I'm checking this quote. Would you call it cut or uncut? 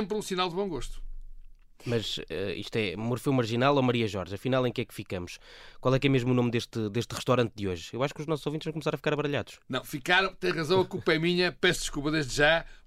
uncut